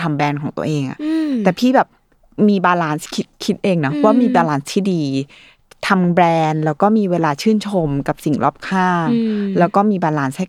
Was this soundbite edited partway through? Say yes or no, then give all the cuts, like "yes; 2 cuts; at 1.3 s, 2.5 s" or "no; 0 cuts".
no; 0 cuts